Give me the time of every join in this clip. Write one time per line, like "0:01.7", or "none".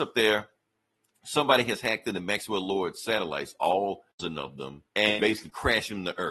0:04.1
0:04.9